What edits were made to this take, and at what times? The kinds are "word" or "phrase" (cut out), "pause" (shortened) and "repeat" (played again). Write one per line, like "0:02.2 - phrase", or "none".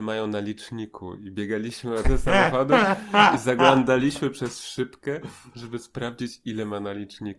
0:02.0 - word